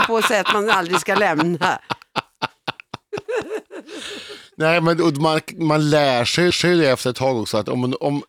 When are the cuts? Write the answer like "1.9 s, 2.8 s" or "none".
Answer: 6.5 s